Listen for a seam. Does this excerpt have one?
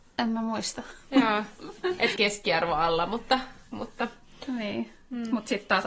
yes; 1 cut; at 2.1 s

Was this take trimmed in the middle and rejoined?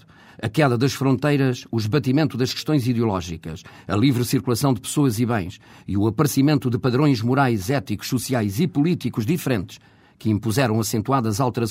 no; 0 cuts

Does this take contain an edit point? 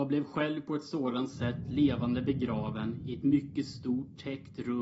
no; 0 cuts

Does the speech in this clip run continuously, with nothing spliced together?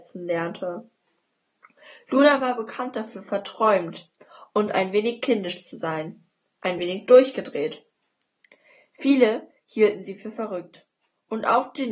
yes; 0 cuts

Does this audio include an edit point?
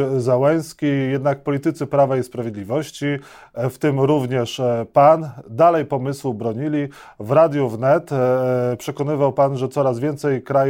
no; 0 cuts

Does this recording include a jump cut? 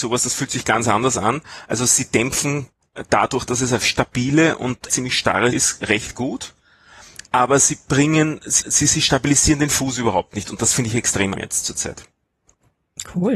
yes; 5 cuts; at 3.8 s, 4.9 s, 5.5 s, 8.6 s, 11.3 s

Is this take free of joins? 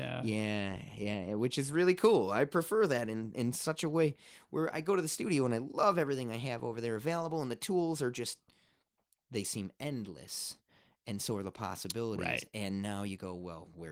yes; 0 cuts

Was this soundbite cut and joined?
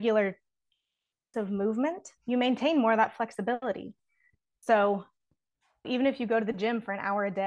yes; 3 cuts; at 1.3 s, 2.2 s, 5.8 s

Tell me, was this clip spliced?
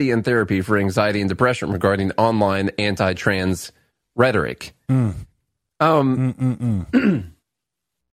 no; 0 cuts

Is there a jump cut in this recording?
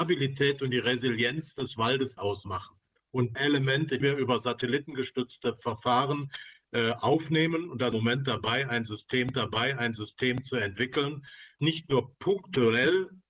yes; 6 cuts; at 2.2 s, 3.3 s, 4.0 s, 7.9 s, 9.3 s, 11.6 s

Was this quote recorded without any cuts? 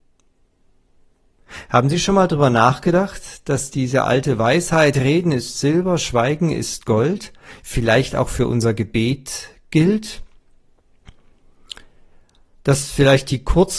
yes; 0 cuts

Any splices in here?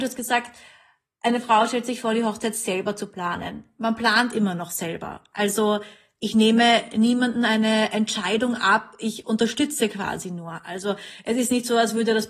no; 0 cuts

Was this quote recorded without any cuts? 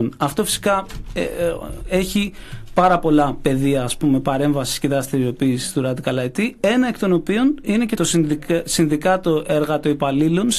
no; 1 cut; at 8.0 s

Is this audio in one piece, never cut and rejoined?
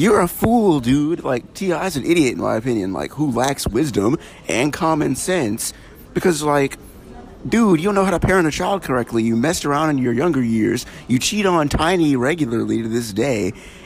yes; 0 cuts

